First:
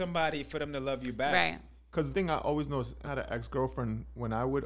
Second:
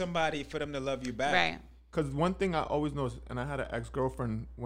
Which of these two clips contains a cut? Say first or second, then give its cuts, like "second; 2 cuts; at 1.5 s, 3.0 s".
first; 2 cuts; at 2.1 s, 3.0 s